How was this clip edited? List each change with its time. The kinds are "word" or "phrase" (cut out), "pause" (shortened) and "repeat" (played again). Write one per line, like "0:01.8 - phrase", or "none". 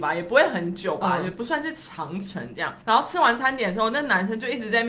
0:02.8 - pause